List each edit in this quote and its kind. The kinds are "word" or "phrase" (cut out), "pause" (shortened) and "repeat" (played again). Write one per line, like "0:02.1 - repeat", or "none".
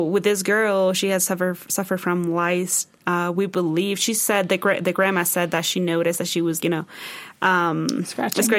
0:06.6 - word